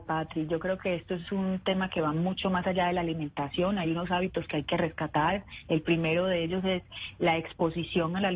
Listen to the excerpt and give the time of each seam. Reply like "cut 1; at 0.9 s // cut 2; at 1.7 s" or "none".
none